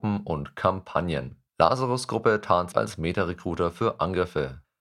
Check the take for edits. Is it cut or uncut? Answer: cut